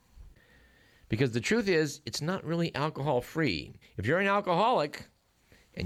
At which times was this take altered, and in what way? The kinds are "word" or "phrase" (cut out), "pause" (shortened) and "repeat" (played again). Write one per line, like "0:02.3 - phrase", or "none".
0:03.8 - pause